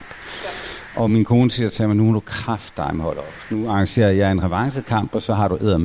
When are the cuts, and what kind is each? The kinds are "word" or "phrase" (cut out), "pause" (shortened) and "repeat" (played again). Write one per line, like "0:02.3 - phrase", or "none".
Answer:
none